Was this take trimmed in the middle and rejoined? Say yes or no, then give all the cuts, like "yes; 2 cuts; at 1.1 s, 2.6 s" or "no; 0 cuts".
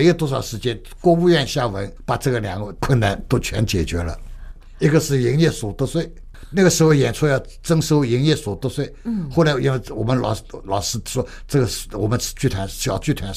no; 0 cuts